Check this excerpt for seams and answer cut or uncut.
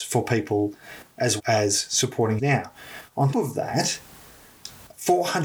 cut